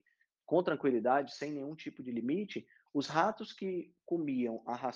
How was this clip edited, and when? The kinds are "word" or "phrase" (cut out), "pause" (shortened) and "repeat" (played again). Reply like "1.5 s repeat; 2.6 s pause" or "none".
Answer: none